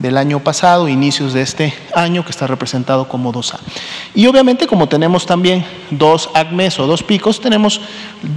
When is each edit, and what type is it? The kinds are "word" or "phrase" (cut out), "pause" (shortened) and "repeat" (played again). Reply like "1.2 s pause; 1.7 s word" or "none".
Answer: none